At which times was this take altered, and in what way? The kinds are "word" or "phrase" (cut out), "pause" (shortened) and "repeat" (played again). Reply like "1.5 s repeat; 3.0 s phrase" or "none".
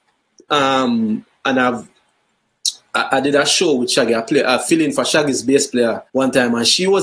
6.1 s pause